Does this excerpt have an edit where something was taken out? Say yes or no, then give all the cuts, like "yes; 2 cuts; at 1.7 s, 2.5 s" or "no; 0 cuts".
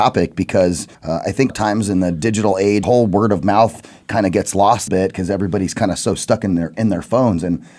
yes; 4 cuts; at 0.9 s, 1.5 s, 2.8 s, 4.9 s